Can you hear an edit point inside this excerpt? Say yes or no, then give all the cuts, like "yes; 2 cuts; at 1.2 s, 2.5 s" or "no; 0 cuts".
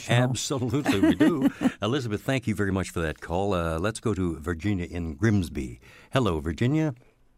no; 0 cuts